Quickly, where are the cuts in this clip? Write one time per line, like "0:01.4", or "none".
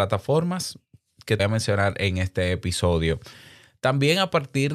0:01.4